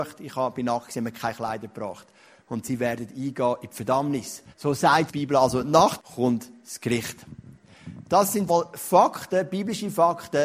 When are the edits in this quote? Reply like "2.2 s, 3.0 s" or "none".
4.5 s, 5.1 s, 6.0 s, 8.5 s